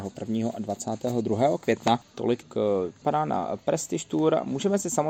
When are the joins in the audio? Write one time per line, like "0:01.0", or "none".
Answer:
0:02.4
0:03.0